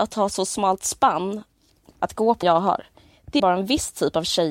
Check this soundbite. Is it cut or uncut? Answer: cut